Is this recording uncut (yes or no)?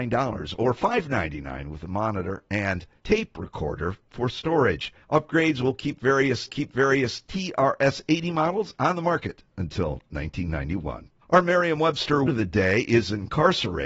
no